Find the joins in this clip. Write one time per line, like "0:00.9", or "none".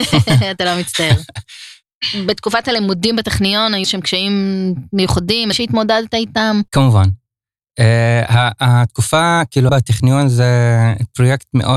0:03.8
0:05.5
0:06.7
0:09.7

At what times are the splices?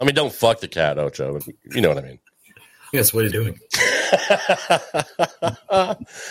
0:01.4
0:02.9
0:03.3

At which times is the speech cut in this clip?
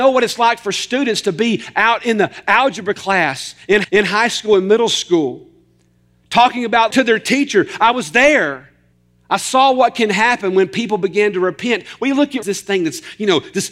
0:03.8
0:06.9
0:08.9
0:12.4

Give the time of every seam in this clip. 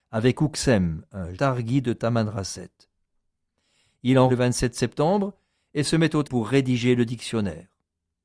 0:01.3
0:04.3
0:06.2

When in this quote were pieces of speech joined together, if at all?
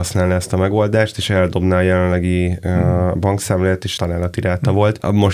0:04.0

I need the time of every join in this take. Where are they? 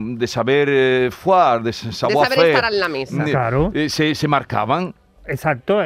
none

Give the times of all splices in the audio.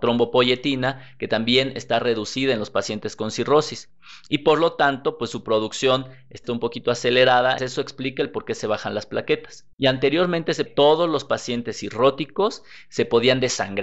0:06.4
0:07.6
0:09.7
0:10.7

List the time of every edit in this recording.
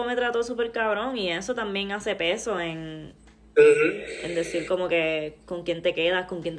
none

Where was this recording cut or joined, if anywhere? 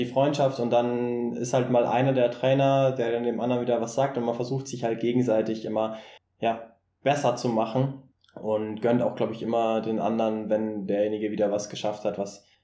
none

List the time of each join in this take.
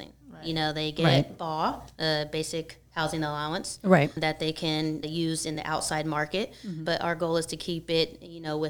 none

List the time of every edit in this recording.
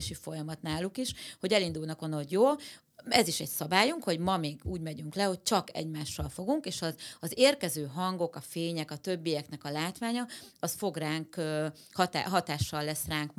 none

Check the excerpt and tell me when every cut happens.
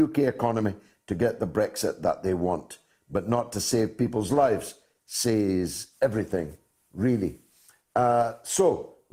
none

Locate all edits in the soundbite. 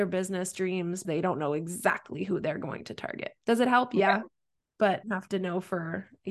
0:01.0
0:05.0

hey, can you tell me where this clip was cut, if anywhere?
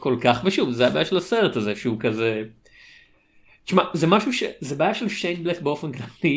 none

